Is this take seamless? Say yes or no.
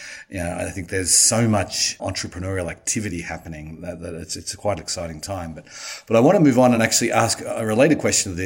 yes